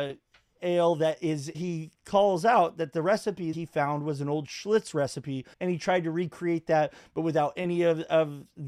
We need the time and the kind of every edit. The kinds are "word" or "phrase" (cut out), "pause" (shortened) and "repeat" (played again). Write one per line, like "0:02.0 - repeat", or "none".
0:01.5 - word
0:03.5 - word
0:05.5 - pause